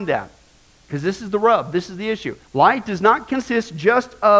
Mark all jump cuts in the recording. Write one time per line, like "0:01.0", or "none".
0:02.4